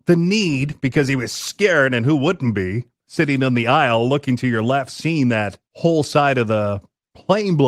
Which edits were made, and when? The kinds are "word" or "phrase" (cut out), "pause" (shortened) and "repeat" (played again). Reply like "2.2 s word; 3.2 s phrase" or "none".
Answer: 5.6 s pause